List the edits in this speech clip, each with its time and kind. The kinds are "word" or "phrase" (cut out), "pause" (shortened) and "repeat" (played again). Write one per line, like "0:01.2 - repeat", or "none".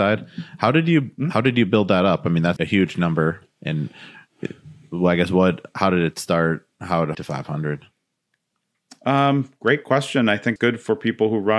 0:02.6 - word
0:07.1 - phrase
0:10.6 - word